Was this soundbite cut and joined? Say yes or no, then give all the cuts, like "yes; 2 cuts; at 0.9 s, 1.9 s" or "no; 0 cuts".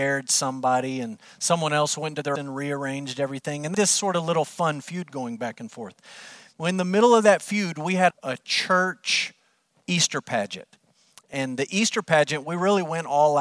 yes; 3 cuts; at 2.4 s, 3.7 s, 8.1 s